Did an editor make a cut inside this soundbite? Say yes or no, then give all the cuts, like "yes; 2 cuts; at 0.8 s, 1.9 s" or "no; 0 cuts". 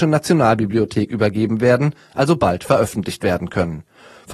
no; 0 cuts